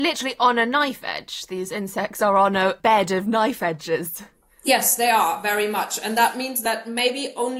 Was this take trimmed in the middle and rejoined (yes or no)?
no